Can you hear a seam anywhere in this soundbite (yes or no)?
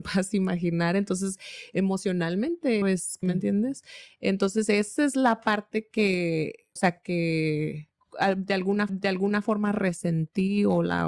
yes